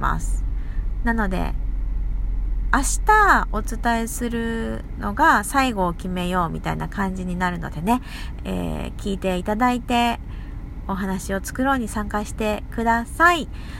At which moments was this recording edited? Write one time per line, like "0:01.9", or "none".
0:08.4